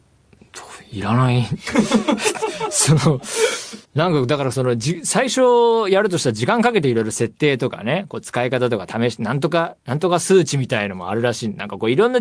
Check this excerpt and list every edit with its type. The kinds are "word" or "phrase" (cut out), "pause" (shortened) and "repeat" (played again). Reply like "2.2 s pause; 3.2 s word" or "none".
3.8 s pause